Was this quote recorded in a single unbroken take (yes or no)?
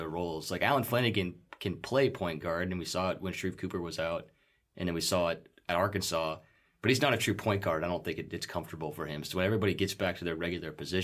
yes